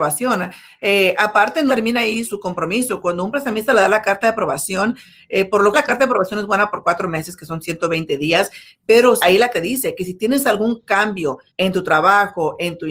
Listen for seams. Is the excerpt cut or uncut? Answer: cut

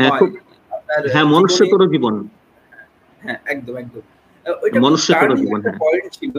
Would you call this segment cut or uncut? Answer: uncut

